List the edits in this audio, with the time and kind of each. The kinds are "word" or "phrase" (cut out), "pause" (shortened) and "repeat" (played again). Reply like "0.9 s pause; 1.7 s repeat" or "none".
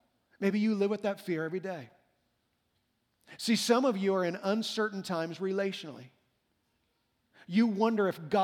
none